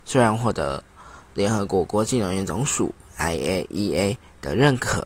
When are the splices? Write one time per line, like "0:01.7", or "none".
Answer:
none